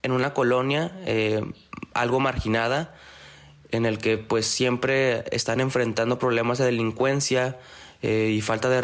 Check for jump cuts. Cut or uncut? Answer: uncut